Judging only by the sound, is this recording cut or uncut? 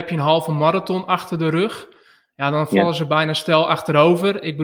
uncut